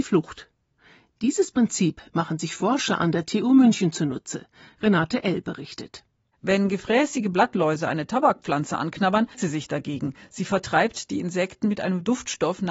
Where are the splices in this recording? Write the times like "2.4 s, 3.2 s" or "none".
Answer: 9.3 s